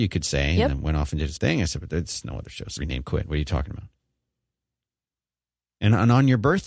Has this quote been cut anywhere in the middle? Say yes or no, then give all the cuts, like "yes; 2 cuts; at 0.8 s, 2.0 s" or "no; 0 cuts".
yes; 2 cuts; at 1.4 s, 2.8 s